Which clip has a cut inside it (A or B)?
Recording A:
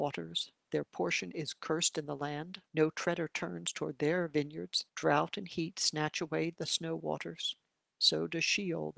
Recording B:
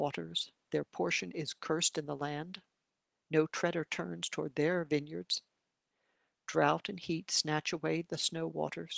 A